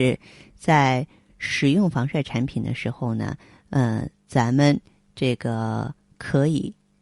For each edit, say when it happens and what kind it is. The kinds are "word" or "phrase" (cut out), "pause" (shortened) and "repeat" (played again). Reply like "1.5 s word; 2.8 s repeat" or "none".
none